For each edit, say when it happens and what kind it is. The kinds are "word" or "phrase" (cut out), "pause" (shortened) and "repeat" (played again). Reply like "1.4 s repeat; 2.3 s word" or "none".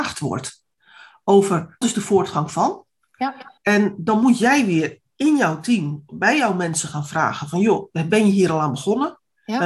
1.8 s word; 3.6 s pause